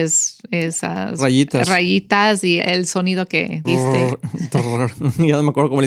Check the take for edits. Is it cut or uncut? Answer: cut